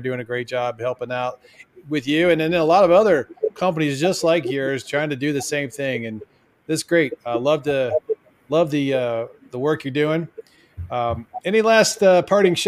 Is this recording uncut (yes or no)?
yes